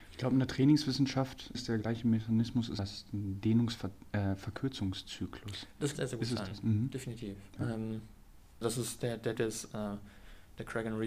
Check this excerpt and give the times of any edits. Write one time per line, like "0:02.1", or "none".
0:01.5
0:02.8
0:05.9
0:08.6
0:09.4